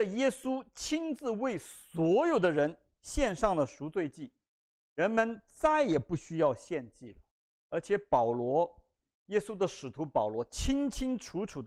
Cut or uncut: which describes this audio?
uncut